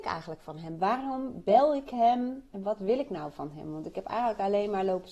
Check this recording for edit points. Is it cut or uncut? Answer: uncut